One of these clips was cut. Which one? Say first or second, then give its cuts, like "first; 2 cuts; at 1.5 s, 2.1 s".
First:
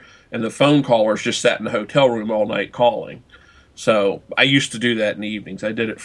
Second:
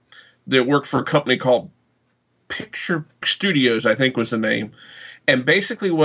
second; 1 cut; at 3.2 s